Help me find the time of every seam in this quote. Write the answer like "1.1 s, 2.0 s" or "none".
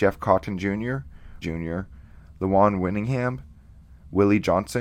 1.4 s

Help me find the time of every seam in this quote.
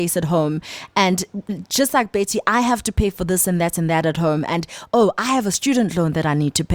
none

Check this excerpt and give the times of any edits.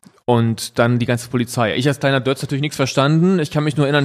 none

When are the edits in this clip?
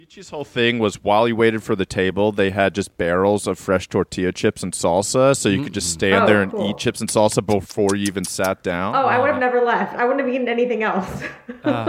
none

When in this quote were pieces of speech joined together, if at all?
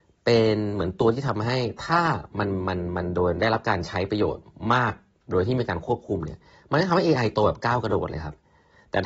none

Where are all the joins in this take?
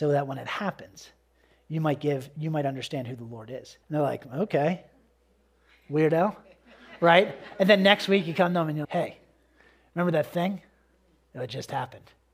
3.8 s, 8.8 s

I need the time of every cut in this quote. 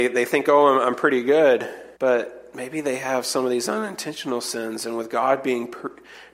2.0 s

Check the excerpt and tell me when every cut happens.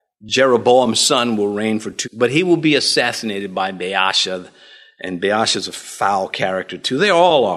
2.0 s

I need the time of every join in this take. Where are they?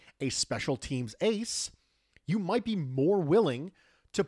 none

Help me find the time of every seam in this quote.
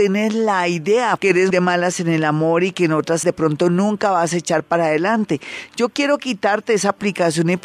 1.2 s, 1.5 s, 3.2 s

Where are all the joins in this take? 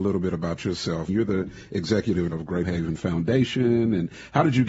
1.1 s, 2.3 s, 2.6 s

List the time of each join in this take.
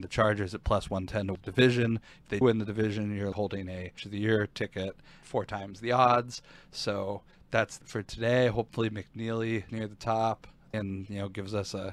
1.4 s, 2.4 s, 3.3 s, 4.0 s, 5.2 s, 7.8 s, 9.7 s, 10.7 s

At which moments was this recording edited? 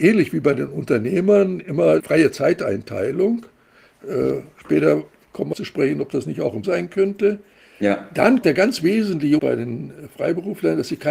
2.0 s, 5.5 s, 6.6 s, 8.4 s, 9.4 s

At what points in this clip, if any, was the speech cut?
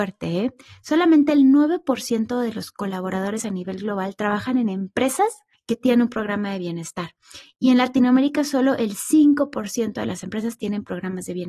5.5 s

